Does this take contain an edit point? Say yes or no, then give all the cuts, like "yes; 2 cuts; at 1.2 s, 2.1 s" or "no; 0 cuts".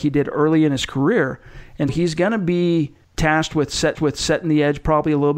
yes; 3 cuts; at 1.9 s, 3.0 s, 4.0 s